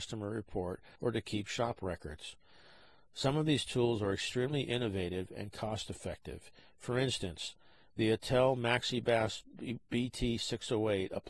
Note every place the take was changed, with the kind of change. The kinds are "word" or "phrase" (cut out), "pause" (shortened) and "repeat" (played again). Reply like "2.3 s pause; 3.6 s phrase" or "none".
1.0 s pause